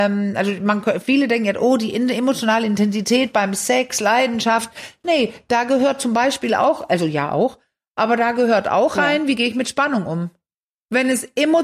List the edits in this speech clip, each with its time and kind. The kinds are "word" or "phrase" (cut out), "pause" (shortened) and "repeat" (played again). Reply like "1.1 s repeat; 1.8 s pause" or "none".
none